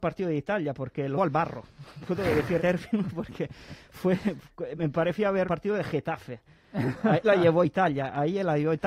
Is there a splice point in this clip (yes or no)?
yes